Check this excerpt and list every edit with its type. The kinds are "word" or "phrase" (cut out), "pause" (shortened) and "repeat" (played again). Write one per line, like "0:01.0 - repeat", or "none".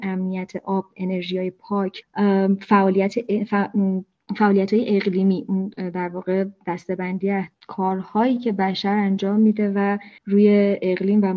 0:10.2 - pause